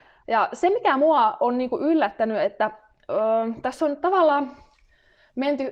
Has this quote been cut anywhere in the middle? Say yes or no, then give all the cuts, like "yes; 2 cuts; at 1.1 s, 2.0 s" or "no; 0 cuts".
no; 0 cuts